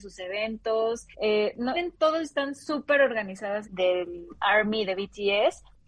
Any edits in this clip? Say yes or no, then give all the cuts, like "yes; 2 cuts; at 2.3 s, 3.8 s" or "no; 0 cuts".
yes; 3 cuts; at 1.1 s, 1.7 s, 3.6 s